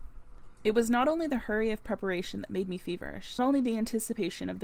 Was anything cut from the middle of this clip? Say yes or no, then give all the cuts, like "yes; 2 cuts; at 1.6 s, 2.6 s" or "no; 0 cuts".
yes; 1 cut; at 3.4 s